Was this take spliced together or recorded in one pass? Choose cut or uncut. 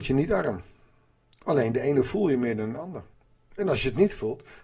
uncut